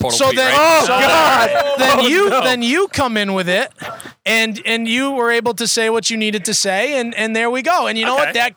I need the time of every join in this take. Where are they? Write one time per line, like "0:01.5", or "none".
0:01.8
0:02.4